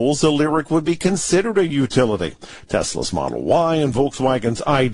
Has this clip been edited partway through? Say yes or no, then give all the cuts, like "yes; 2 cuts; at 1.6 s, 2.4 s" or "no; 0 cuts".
no; 0 cuts